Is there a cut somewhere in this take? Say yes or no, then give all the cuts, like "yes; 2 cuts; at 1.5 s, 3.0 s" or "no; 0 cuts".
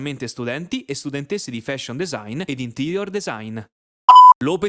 no; 0 cuts